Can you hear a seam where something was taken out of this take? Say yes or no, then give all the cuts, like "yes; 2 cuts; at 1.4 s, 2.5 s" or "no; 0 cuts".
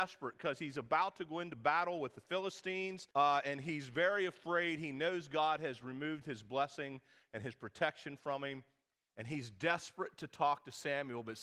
yes; 1 cut; at 3.1 s